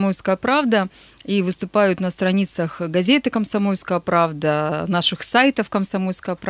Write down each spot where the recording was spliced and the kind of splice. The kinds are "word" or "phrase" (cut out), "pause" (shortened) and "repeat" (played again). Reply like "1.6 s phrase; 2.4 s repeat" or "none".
none